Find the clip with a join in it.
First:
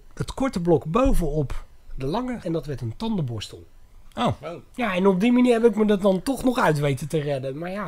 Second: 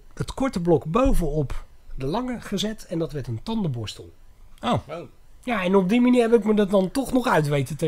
first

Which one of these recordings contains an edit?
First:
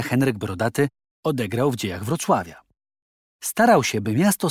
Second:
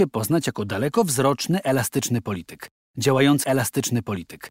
second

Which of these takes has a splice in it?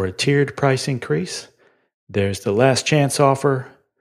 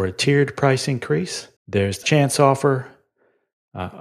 second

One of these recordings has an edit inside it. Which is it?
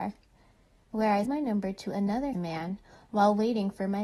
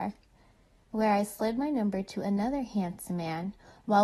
first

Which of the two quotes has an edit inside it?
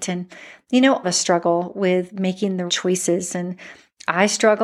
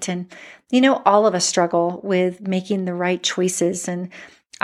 first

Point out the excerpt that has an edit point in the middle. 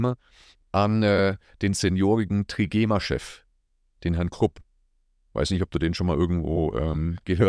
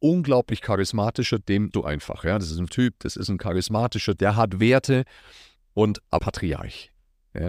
second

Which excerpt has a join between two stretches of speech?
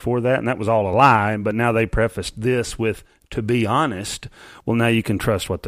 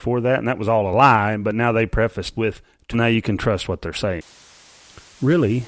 second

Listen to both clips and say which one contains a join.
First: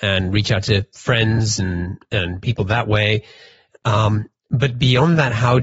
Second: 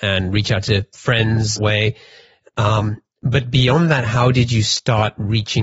second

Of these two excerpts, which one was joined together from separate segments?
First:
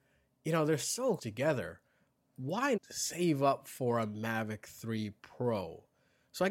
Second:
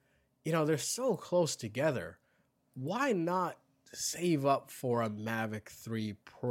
first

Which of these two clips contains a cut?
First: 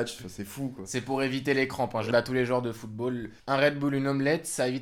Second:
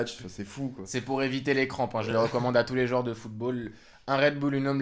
first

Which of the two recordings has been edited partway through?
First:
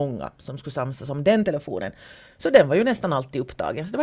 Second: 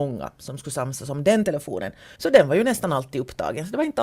second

